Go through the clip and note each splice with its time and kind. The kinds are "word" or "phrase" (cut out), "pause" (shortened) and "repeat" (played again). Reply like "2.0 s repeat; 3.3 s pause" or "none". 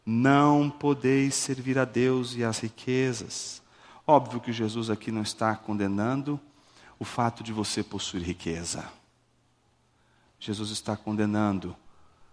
none